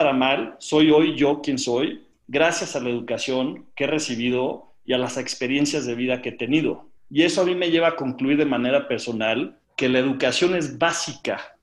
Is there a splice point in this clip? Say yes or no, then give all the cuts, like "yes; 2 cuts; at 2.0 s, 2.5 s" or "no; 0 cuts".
yes; 2 cuts; at 7.0 s, 9.6 s